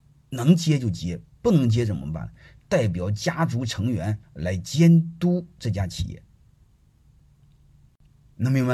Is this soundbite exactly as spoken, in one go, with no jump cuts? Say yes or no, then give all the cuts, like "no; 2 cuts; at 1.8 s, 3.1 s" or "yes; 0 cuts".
no; 1 cut; at 4.2 s